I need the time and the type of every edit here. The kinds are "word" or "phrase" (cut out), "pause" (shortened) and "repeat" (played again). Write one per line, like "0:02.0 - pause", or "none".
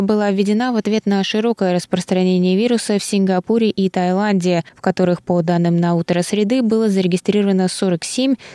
none